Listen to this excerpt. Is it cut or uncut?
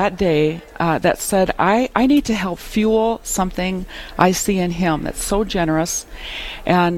uncut